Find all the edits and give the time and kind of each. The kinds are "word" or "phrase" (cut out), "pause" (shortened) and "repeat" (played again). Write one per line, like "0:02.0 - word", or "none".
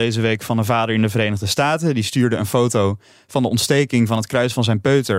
none